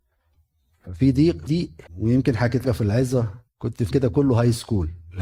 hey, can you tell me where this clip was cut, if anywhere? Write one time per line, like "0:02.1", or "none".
0:01.5
0:01.9
0:02.6
0:03.5
0:03.9